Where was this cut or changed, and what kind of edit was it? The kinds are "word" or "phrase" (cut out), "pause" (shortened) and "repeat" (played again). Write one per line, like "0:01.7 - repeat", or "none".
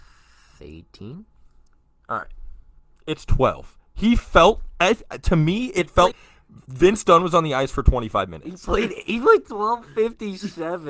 0:06.1 - word